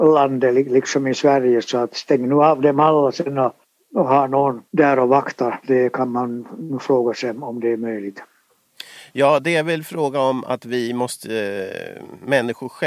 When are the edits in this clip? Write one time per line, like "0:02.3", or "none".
0:03.6
0:04.7